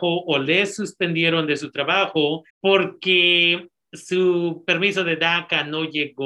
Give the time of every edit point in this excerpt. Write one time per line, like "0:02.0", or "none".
0:02.5